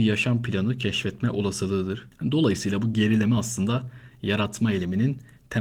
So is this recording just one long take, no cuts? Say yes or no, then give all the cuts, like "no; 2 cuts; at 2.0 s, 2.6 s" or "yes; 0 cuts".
yes; 0 cuts